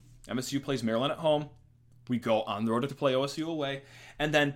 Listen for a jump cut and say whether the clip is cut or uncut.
cut